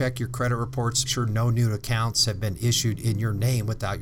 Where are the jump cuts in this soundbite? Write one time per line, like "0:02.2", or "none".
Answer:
0:01.0